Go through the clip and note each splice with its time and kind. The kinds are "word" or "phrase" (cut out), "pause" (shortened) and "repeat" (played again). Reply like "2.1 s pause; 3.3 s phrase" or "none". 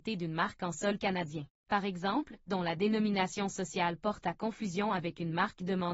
1.6 s pause; 2.5 s phrase